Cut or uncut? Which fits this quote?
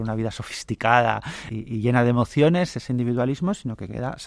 uncut